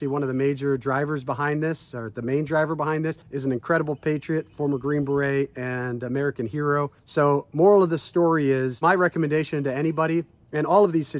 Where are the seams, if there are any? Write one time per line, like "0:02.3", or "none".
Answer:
0:03.2
0:07.0